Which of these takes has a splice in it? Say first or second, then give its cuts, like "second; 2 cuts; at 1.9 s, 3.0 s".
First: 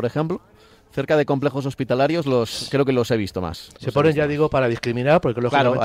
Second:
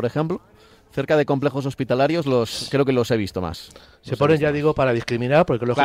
first; 1 cut; at 3.7 s